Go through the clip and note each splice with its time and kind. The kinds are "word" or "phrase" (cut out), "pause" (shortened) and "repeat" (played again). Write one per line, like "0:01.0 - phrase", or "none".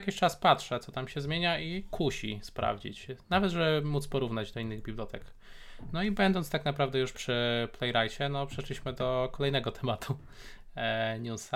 0:07.1 - word